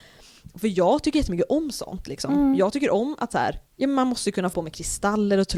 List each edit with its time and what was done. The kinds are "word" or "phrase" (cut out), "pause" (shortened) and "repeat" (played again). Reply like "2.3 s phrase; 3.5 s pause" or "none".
3.7 s pause; 4.5 s word

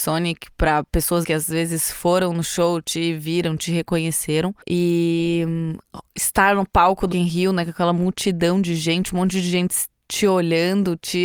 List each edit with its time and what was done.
1.2 s word; 4.6 s pause; 7.1 s word

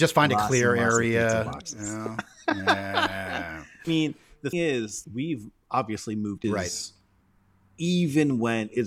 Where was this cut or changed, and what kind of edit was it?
3.8 s word; 4.5 s word; 5.0 s word; 6.4 s phrase

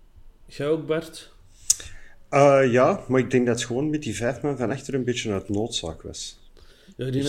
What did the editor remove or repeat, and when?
none

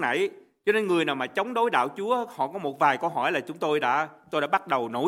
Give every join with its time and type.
none

